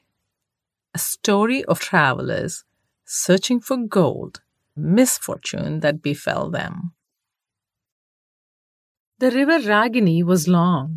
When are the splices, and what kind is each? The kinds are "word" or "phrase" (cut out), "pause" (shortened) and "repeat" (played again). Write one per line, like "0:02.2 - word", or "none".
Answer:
0:01.8 - word
0:04.8 - phrase